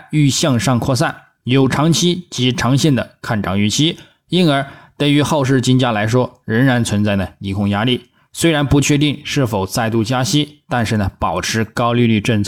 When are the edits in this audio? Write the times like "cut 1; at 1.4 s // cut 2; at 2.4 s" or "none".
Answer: none